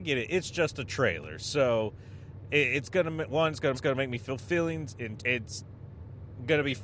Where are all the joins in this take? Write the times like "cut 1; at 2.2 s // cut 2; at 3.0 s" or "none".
cut 1; at 3.7 s // cut 2; at 5.2 s